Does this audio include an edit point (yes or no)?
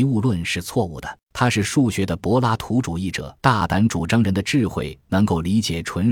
yes